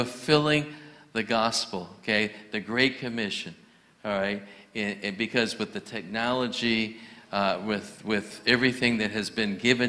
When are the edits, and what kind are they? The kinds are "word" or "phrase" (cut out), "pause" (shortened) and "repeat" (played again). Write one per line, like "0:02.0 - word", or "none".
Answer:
none